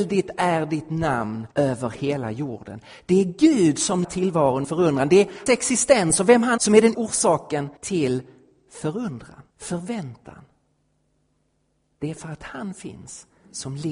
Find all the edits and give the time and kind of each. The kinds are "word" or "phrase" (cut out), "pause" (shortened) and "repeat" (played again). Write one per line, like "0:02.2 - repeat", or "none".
0:01.5 - pause
0:04.0 - word
0:04.6 - word
0:05.5 - word
0:06.6 - word
0:06.9 - word
0:07.8 - pause
0:09.5 - pause